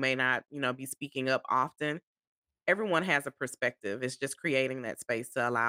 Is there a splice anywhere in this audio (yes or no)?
no